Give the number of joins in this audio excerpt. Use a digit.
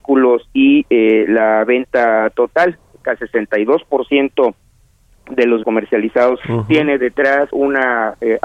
4